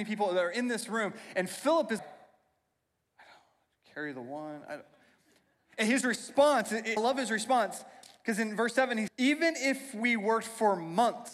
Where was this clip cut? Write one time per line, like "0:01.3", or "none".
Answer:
0:02.0
0:07.0
0:09.1